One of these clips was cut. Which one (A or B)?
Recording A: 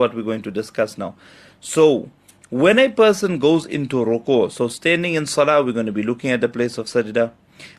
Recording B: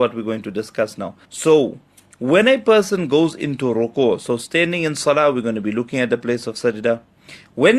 B